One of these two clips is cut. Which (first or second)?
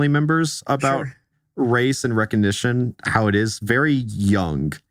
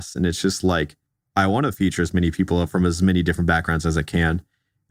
first